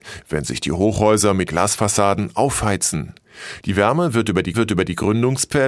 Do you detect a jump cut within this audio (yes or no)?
yes